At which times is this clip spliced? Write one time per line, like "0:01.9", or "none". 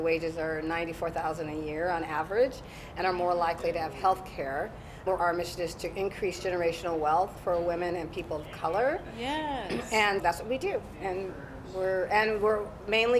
0:05.2
0:10.2